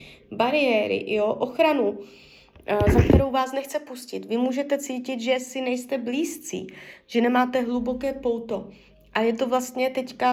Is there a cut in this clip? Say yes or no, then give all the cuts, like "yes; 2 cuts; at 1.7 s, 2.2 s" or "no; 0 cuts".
no; 0 cuts